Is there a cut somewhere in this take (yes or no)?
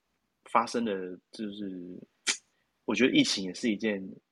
yes